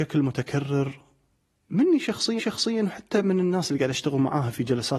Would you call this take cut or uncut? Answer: cut